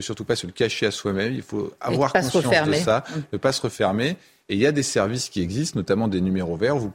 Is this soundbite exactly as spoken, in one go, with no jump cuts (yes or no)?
yes